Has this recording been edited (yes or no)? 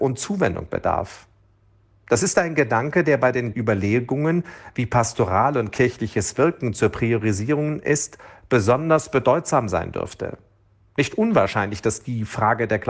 yes